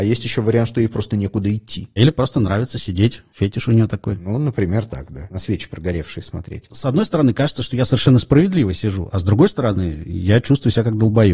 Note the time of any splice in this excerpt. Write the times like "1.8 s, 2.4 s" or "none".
none